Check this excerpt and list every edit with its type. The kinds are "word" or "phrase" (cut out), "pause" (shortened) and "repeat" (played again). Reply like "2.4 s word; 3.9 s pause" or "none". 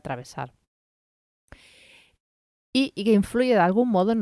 none